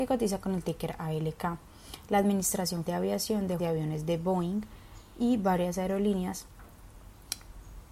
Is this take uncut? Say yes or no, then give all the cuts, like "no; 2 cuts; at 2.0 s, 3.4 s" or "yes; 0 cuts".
no; 2 cuts; at 2.9 s, 3.6 s